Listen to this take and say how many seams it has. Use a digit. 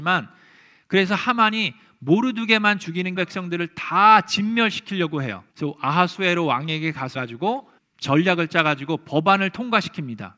4